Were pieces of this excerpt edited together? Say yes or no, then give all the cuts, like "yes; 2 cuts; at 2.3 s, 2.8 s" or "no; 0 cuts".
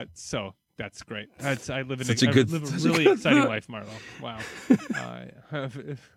no; 0 cuts